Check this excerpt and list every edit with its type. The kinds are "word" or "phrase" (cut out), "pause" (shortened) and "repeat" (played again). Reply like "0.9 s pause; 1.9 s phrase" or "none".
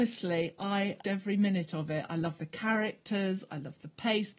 1.0 s word